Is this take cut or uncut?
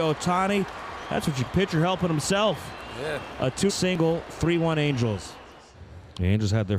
cut